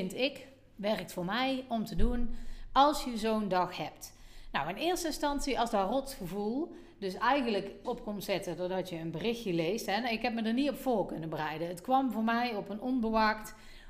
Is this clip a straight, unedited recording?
no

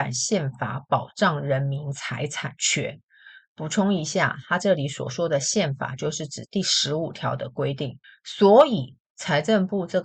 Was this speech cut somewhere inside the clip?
yes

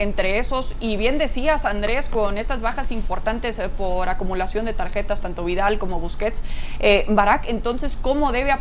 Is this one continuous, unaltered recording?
yes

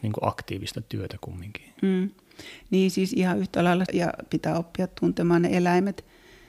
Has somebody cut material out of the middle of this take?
yes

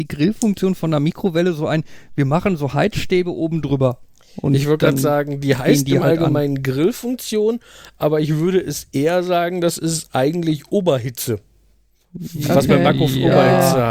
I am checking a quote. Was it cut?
no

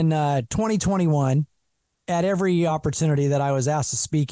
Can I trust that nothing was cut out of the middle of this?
yes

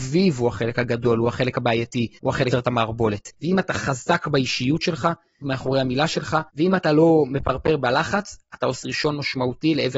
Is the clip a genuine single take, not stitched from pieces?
no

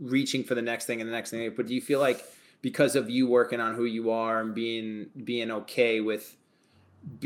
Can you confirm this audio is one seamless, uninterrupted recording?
yes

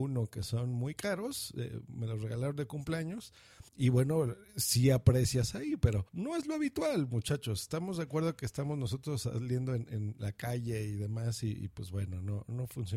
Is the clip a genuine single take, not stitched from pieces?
no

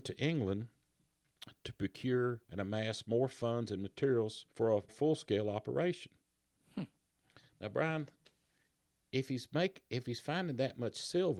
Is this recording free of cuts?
no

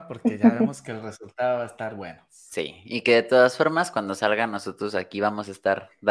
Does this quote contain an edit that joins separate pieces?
no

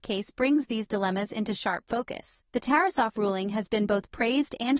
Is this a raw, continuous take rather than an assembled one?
no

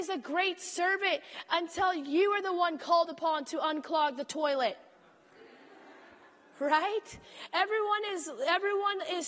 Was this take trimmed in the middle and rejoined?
no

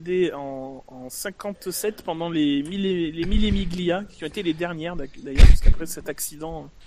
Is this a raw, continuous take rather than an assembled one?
yes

